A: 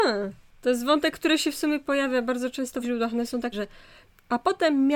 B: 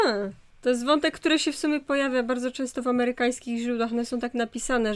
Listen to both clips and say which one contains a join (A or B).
A